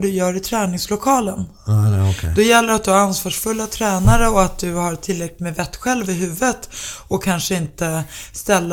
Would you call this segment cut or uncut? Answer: uncut